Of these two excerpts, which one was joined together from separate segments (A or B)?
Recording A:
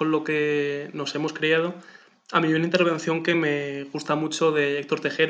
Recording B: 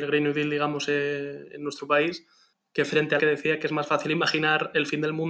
B